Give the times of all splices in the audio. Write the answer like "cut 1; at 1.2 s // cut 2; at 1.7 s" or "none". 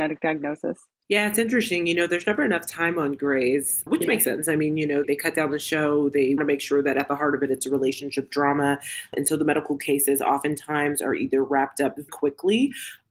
cut 1; at 3.9 s // cut 2; at 5.0 s // cut 3; at 6.4 s // cut 4; at 9.1 s // cut 5; at 12.1 s